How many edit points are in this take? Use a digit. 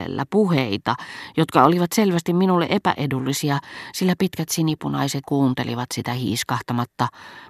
1